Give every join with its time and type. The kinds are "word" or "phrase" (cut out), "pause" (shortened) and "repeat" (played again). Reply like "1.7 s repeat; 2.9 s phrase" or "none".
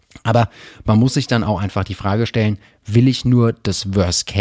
none

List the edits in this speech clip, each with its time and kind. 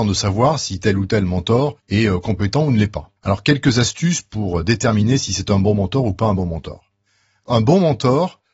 1.8 s pause; 3.2 s pause

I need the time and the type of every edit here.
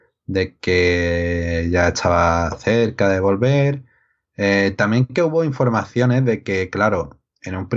none

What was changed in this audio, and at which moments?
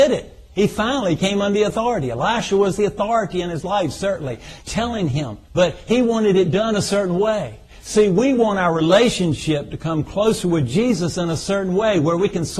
5.4 s pause

